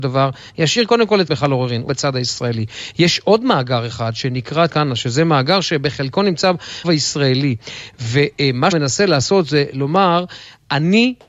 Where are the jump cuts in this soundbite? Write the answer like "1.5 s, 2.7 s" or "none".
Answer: 1.3 s, 1.9 s, 4.7 s, 6.8 s, 8.7 s